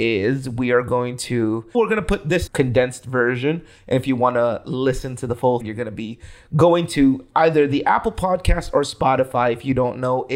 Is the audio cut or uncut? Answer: cut